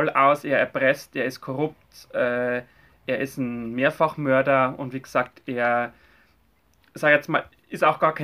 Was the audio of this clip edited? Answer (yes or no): no